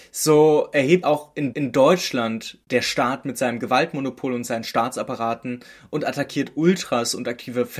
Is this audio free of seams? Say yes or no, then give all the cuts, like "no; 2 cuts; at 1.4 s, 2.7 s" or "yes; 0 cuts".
no; 2 cuts; at 1.0 s, 1.5 s